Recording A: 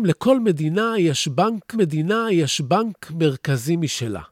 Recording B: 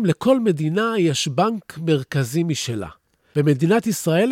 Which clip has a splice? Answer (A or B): A